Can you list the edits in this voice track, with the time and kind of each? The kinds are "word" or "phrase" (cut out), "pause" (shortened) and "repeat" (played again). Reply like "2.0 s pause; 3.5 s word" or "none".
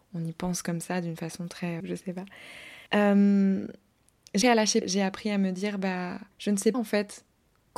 1.8 s phrase; 2.9 s pause; 4.4 s word; 4.8 s word; 6.3 s pause; 6.7 s word